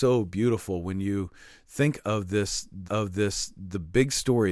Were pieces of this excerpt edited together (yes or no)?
yes